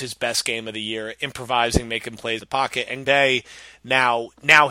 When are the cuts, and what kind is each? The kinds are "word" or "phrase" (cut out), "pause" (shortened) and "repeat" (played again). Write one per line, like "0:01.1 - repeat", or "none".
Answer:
0:02.4 - word
0:03.0 - word